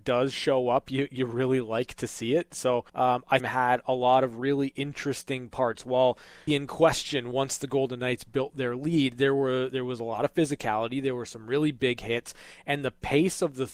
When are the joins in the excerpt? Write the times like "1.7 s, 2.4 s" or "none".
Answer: 2.9 s, 3.4 s, 6.5 s